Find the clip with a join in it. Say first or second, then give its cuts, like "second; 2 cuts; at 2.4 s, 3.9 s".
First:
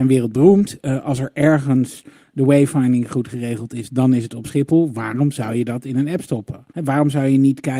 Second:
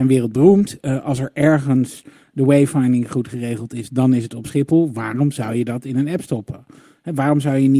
first; 1 cut; at 6.7 s